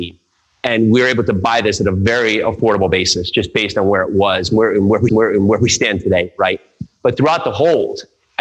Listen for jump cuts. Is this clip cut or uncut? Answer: cut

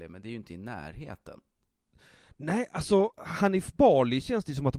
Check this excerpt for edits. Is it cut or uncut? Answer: uncut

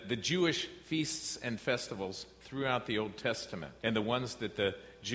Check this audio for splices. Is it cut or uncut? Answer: cut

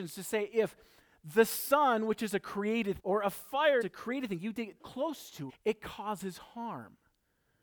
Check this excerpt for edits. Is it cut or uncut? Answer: cut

